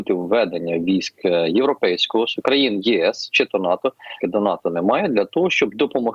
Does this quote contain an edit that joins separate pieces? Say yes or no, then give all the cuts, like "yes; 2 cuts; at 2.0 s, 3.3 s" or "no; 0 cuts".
yes; 1 cut; at 4.2 s